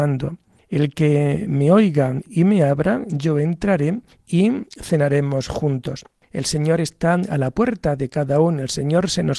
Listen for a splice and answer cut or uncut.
uncut